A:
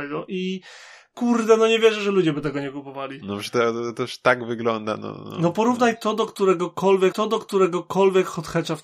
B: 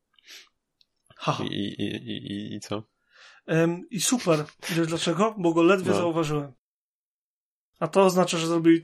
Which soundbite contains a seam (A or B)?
A